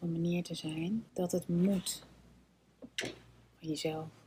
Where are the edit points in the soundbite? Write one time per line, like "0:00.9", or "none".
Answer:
0:01.1

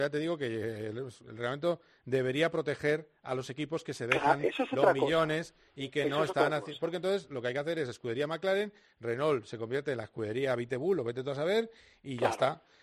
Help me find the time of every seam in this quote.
none

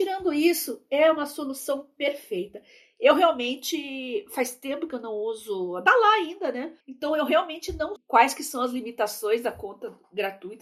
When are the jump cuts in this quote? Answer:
0:05.9
0:06.8
0:08.0

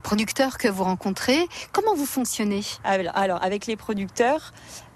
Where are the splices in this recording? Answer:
none

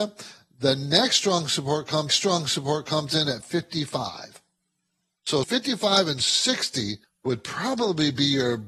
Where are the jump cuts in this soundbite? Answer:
0:02.1
0:03.4
0:05.4
0:07.0

